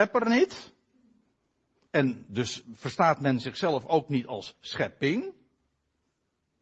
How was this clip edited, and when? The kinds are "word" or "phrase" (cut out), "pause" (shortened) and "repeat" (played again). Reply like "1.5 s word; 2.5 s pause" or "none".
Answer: none